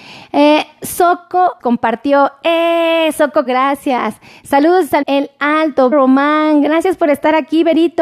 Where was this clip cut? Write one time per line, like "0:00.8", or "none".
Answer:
0:01.6
0:03.5
0:05.0
0:05.9